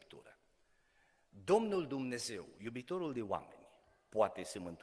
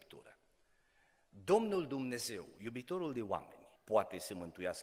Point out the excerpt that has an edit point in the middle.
second; 1 cut; at 3.8 s

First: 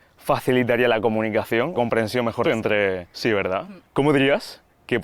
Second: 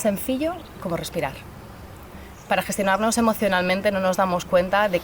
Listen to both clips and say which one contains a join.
first; 3 cuts; at 1.7 s, 2.4 s, 3.1 s

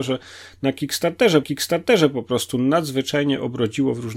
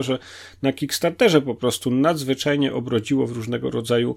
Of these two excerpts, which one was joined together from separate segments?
first; 1 cut; at 1.4 s

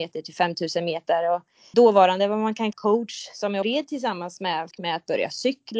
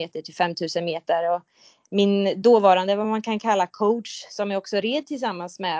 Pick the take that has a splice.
first; 4 cuts; at 1.7 s, 2.7 s, 3.6 s, 4.7 s

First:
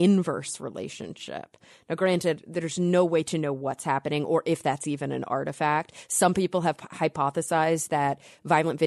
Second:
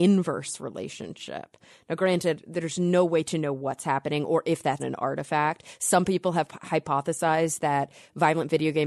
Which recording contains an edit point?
second; 1 cut; at 4.8 s

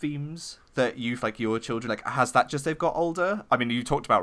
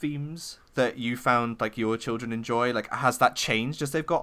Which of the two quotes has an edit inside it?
first; 3 cuts; at 1.2 s, 1.9 s, 2.5 s

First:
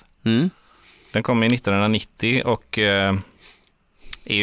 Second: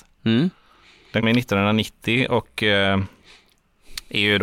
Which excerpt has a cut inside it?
second; 1 cut; at 1.2 s

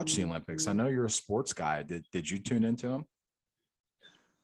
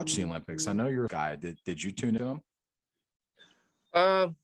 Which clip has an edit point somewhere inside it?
second; 2 cuts; at 1.1 s, 2.2 s

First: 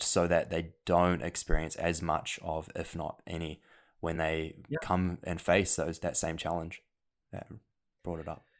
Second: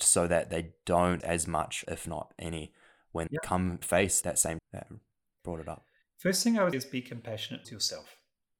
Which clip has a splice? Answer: second; 8 cuts; at 1.2 s, 1.8 s, 3.3 s, 3.8 s, 4.2 s, 4.6 s, 6.7 s, 7.6 s

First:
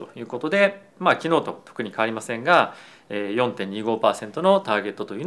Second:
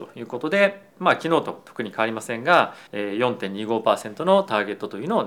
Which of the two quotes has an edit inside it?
second; 1 cut; at 2.9 s

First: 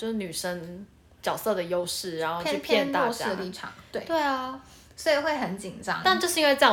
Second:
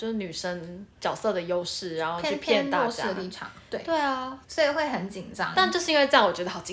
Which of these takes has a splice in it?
second; 2 cuts; at 0.9 s, 4.4 s

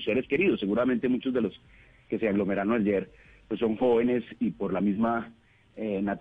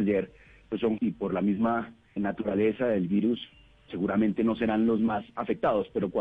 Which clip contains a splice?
second; 3 cuts; at 1.0 s, 2.2 s, 3.9 s

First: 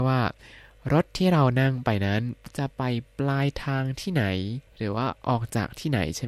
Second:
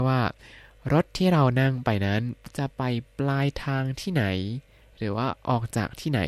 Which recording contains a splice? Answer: first; 1 cut; at 4.7 s

